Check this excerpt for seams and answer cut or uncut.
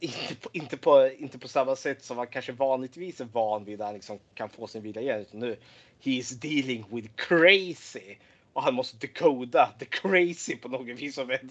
uncut